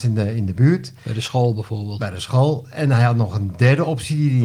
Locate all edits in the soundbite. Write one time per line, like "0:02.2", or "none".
none

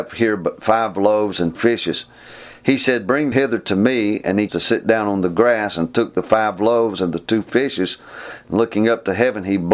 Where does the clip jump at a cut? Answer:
0:01.5
0:03.3
0:04.5

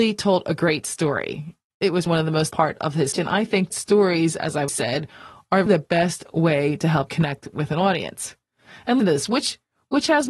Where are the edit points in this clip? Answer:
0:02.1
0:02.5
0:03.1
0:03.7
0:04.7
0:05.7
0:07.1
0:09.0

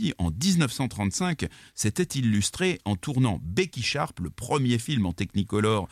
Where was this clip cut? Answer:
none

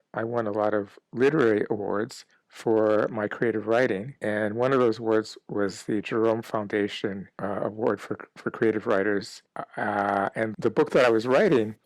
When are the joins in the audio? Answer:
0:10.5

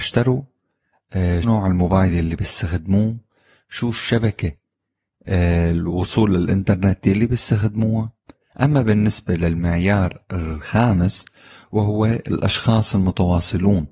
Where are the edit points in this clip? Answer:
0:01.4

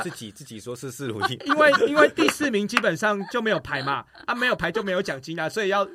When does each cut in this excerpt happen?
0:01.4

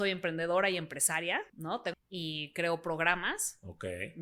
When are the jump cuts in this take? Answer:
0:01.5
0:01.9

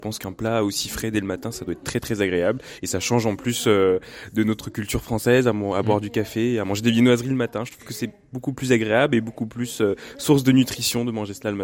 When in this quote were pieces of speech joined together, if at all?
none

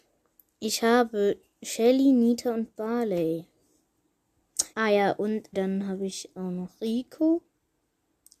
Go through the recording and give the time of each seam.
0:04.7
0:05.5

